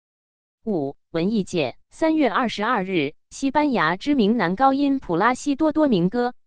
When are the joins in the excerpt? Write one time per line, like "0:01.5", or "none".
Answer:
0:01.8